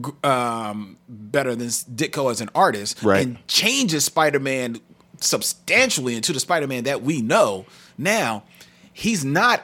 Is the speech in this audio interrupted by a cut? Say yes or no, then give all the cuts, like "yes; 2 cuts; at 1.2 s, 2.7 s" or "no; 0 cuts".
no; 0 cuts